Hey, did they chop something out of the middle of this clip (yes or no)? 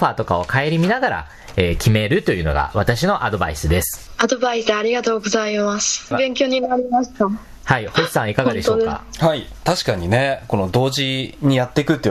no